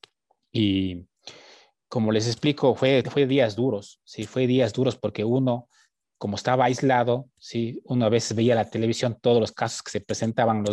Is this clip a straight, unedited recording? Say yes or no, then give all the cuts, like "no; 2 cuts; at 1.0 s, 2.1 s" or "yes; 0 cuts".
no; 1 cut; at 3.0 s